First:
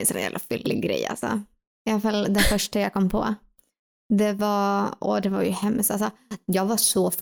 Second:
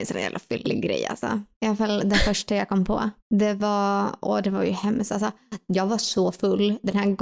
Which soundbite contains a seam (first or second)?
second